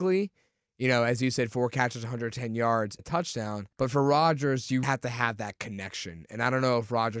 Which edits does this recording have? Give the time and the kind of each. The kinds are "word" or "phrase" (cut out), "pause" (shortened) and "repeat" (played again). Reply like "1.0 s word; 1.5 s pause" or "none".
3.0 s word; 3.7 s pause; 4.8 s word